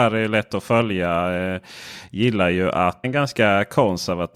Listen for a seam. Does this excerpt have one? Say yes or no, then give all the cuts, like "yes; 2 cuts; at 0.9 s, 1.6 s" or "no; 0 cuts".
yes; 1 cut; at 3.0 s